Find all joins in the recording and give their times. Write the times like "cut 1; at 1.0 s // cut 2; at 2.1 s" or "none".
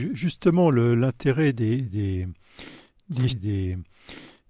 cut 1; at 3.3 s